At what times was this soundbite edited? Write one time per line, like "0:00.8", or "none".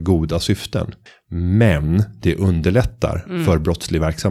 0:01.1